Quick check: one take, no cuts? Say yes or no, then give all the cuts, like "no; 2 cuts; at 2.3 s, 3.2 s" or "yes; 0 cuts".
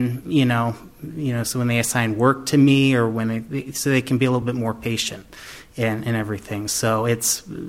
yes; 0 cuts